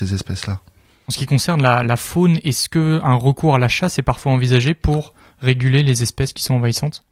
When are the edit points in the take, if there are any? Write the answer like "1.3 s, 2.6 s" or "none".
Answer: none